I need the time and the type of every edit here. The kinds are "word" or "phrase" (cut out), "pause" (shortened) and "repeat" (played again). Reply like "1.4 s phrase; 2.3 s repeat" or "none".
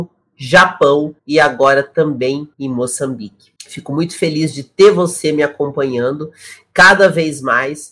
1.2 s pause; 2.5 s pause; 3.6 s pause